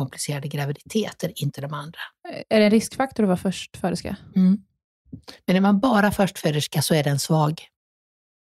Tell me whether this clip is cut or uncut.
uncut